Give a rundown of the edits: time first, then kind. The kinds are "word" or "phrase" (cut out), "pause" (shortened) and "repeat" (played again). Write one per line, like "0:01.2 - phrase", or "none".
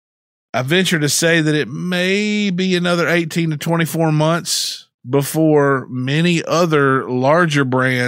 0:05.0 - pause